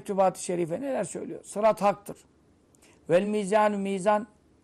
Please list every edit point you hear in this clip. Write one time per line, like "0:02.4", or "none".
none